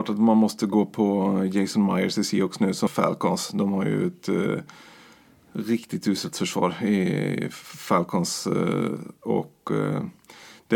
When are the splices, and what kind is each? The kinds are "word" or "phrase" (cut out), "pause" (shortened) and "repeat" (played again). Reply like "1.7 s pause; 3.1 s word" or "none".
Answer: 2.9 s word